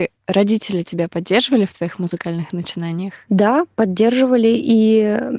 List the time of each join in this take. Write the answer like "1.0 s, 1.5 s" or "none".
none